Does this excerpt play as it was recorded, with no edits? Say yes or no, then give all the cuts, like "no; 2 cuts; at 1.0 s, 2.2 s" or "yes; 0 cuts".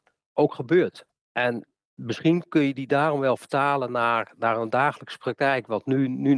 yes; 0 cuts